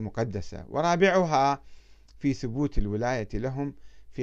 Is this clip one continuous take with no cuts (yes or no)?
yes